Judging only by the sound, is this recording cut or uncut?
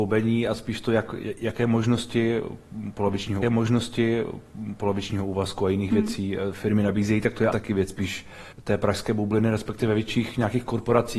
cut